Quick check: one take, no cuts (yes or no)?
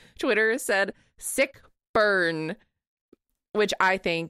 yes